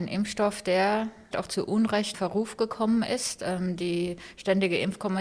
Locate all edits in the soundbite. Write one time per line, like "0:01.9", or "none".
0:01.3
0:02.1